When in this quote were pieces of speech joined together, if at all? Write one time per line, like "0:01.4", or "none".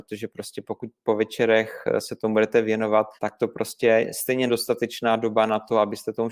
0:03.2
0:04.5